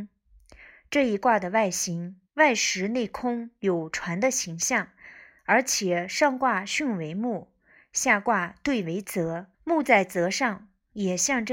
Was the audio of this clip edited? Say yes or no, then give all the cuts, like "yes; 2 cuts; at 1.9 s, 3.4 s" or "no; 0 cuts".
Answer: yes; 2 cuts; at 2.3 s, 9.5 s